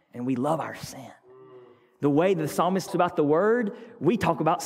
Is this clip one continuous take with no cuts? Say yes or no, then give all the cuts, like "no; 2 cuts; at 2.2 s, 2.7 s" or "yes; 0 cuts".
no; 1 cut; at 2.9 s